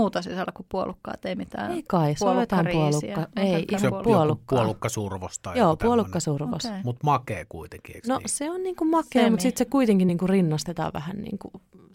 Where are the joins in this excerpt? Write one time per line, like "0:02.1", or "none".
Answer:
none

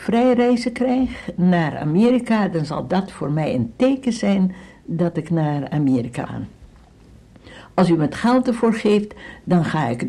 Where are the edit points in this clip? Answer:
0:06.3

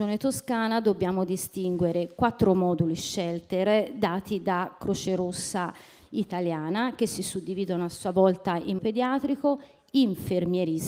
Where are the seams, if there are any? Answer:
0:08.8

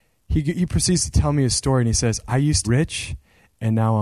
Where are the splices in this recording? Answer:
0:02.6

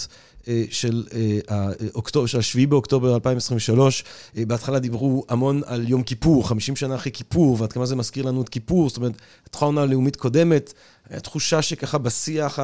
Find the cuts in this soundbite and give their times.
none

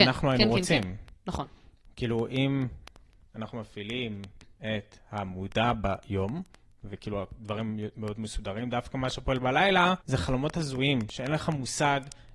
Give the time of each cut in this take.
0:10.0

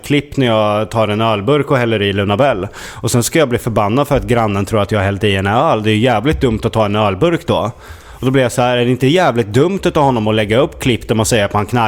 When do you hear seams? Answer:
none

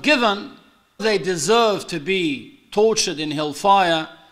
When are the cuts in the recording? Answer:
0:01.0

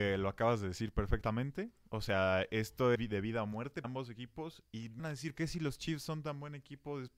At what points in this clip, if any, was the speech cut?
0:02.9
0:03.8
0:05.0
0:05.4

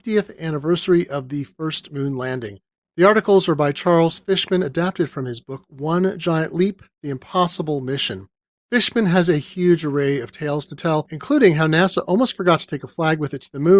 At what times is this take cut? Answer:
none

